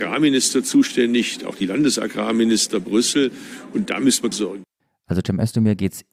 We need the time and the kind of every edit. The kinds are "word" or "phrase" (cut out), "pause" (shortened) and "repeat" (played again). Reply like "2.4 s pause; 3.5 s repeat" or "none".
4.3 s phrase